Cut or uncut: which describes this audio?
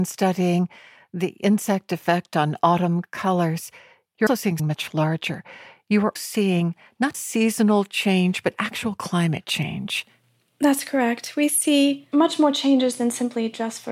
cut